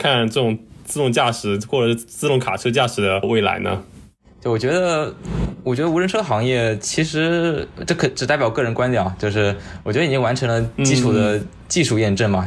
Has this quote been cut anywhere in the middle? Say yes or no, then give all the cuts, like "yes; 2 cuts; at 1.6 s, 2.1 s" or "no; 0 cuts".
no; 0 cuts